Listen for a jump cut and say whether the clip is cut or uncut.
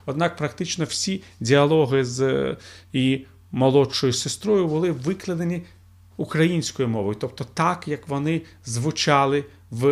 uncut